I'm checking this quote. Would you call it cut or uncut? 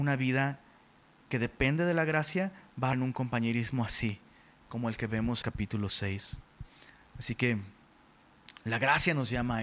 cut